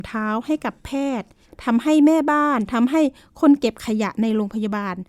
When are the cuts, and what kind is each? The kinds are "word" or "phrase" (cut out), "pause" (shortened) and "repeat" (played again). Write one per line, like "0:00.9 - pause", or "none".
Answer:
none